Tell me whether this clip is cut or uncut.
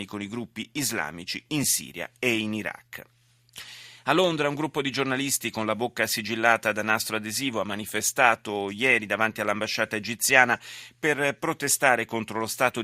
uncut